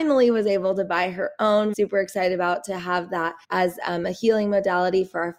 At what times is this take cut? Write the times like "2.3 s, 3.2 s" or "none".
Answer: 1.7 s, 3.4 s